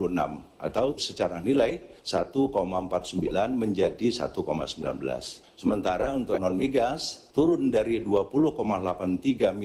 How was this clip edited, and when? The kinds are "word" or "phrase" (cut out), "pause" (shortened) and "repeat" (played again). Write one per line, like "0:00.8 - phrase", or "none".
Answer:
0:01.0 - word
0:02.0 - pause
0:05.4 - pause
0:06.4 - word
0:07.3 - pause